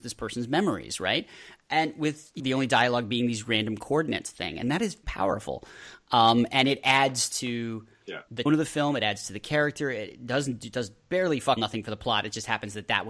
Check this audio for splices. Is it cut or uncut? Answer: cut